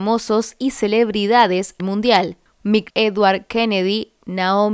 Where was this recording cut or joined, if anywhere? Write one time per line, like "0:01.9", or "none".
0:01.8
0:02.9